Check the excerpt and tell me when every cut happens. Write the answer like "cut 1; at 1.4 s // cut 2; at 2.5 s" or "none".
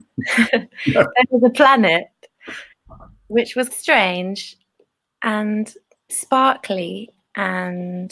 cut 1; at 3.7 s // cut 2; at 6.1 s